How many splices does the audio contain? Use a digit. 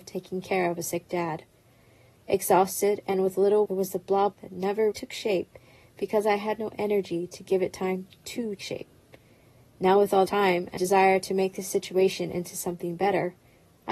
6